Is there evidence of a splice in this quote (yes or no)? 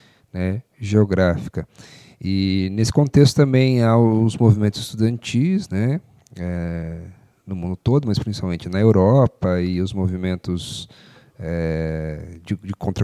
no